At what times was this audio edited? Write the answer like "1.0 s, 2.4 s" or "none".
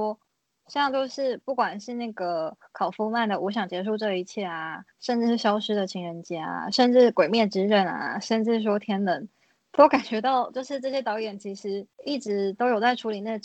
4.9 s, 11.9 s